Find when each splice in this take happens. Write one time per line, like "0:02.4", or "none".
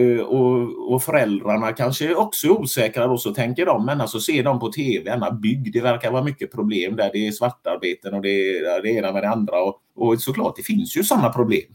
0:09.9